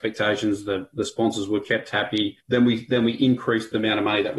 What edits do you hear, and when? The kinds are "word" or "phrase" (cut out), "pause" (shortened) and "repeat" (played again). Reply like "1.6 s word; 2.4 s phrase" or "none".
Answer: 2.4 s pause